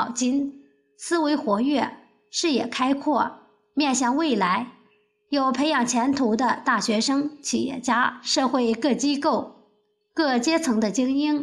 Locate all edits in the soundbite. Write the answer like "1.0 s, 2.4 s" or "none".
none